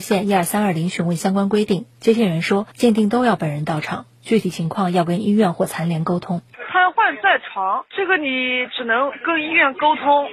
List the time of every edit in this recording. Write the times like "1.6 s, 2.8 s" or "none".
2.7 s

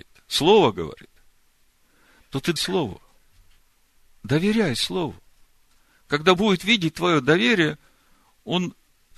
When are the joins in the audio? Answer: 2.6 s, 6.4 s

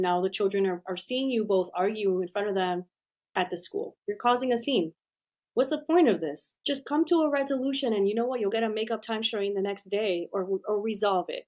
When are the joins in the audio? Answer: none

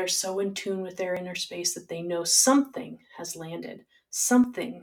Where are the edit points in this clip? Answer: none

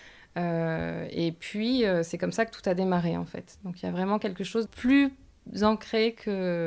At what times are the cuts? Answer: 4.7 s

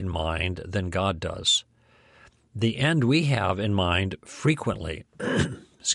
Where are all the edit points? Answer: none

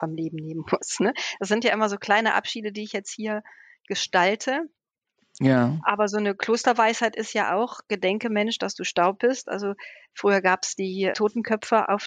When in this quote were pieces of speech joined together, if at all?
11.1 s

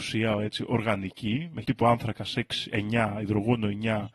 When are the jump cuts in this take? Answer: 1.6 s

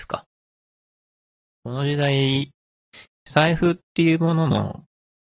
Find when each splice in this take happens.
none

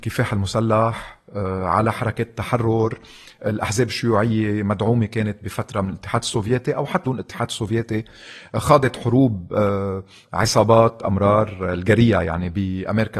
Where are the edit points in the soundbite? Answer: 7.0 s

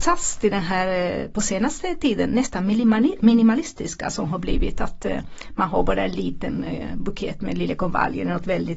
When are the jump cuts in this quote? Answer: none

